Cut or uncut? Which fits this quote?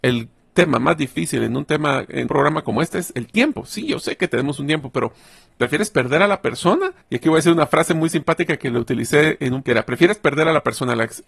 cut